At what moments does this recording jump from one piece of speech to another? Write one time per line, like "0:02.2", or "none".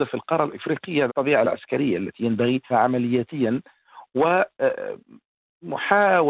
0:01.1
0:01.4
0:02.7